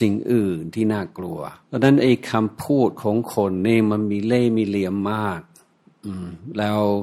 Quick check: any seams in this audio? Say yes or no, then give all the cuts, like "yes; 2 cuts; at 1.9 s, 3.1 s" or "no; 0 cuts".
yes; 1 cut; at 1.6 s